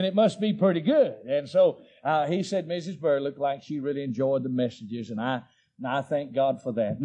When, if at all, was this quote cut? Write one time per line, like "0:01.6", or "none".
none